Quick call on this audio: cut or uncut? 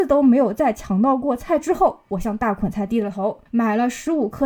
cut